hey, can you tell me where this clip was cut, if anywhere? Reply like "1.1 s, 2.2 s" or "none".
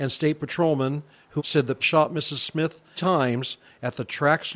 1.4 s, 1.8 s, 3.0 s